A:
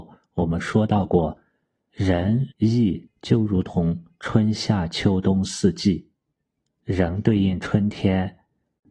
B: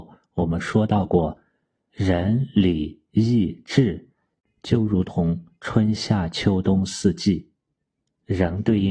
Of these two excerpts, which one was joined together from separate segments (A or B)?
A